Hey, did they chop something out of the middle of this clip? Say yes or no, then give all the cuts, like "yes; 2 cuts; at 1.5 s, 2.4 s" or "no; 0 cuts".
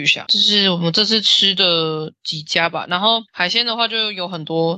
yes; 1 cut; at 3.3 s